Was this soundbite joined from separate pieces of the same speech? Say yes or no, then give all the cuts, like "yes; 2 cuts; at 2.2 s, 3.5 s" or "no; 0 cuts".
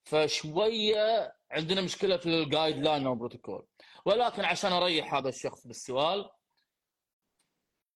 no; 0 cuts